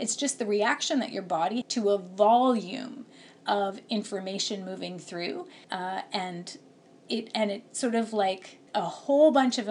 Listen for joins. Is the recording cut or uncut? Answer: cut